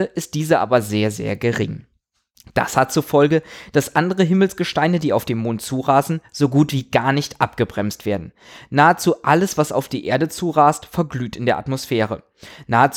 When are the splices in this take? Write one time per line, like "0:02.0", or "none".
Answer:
none